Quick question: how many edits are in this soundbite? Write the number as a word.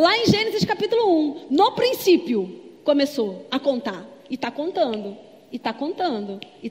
zero